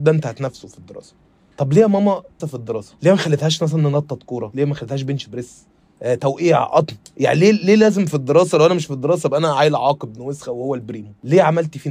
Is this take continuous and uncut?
no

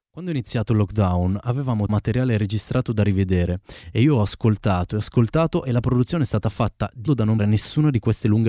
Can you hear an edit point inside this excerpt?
yes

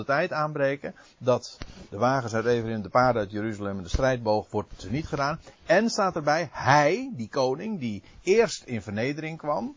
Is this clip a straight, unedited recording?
yes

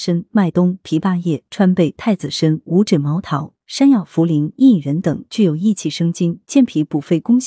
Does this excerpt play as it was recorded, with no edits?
yes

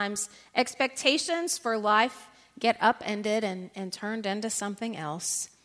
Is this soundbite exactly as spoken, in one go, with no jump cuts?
yes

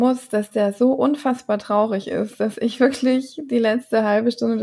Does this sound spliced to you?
no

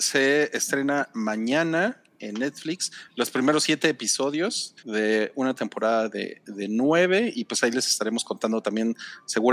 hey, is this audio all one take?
no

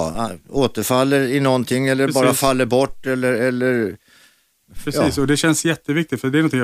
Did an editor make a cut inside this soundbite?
no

